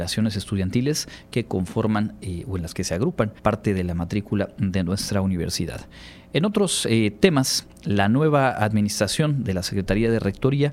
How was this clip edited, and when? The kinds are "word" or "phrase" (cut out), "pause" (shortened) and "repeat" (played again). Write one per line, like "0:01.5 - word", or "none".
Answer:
0:03.4 - pause